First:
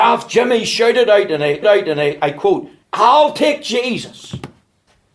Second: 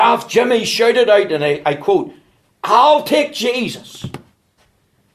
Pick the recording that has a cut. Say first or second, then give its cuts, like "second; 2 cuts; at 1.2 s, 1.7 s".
first; 2 cuts; at 1.6 s, 2.8 s